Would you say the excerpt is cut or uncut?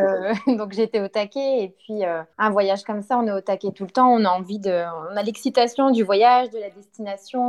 cut